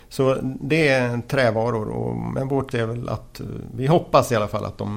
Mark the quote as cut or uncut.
cut